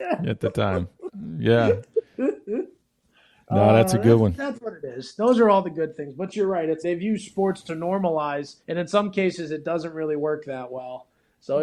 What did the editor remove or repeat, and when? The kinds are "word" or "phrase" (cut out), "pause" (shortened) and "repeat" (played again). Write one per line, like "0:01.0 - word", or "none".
0:06.8 - word
0:08.6 - pause